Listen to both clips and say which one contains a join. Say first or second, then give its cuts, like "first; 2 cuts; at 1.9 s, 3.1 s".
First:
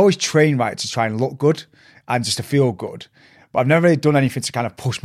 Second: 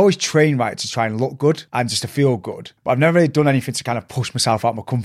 second; 2 cuts; at 1.7 s, 2.8 s